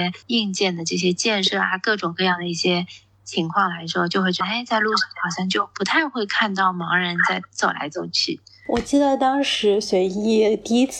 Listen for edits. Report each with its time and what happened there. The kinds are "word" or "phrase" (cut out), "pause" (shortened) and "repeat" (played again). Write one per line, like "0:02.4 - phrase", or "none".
none

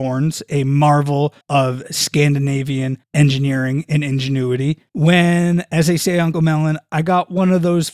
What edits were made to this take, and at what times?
0:01.4 - pause
0:03.0 - pause
0:04.9 - pause
0:06.3 - word

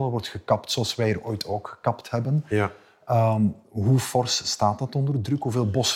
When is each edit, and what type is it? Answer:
0:03.6 - pause

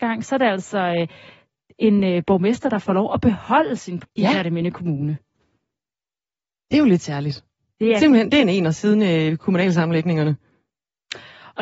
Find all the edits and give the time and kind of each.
0:04.0 - word

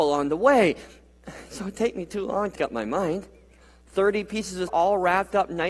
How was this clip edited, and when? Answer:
0:01.7 - word
0:02.6 - word
0:04.7 - word

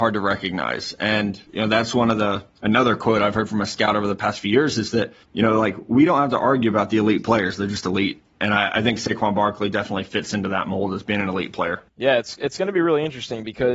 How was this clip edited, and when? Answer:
0:01.5 - pause
0:02.5 - pause
0:05.2 - pause

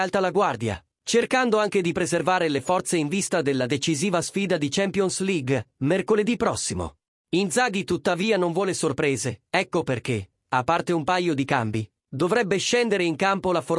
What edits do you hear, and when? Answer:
0:07.2 - pause

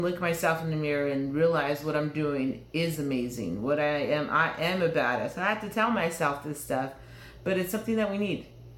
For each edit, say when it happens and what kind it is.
none

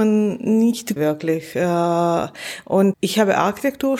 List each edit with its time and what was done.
0:01.0 - word
0:02.9 - word

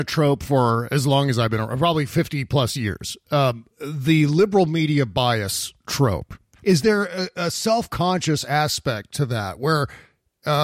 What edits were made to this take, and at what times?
0:06.5 - pause

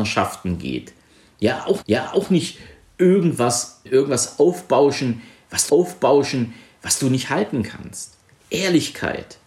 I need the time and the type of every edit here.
0:01.8 - repeat
0:03.9 - word
0:05.7 - repeat

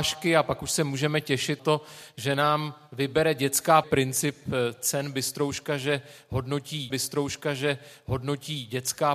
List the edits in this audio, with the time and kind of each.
0:01.6 - word
0:03.8 - phrase
0:06.9 - repeat

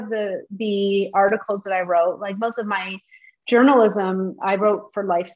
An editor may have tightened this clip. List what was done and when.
none

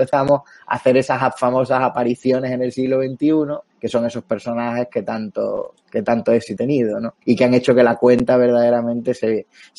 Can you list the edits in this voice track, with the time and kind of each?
0:03.7 - pause
0:06.6 - word
0:07.2 - pause

